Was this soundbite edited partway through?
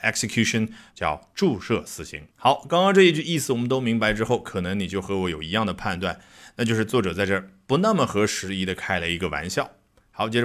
yes; 2 cuts; at 0.9 s, 2.3 s

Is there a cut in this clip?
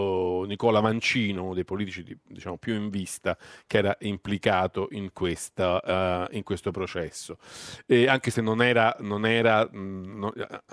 no; 0 cuts

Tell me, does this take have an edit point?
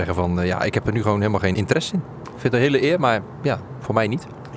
yes; 1 cut; at 1.5 s

